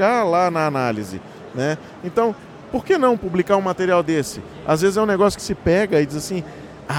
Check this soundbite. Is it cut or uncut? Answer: cut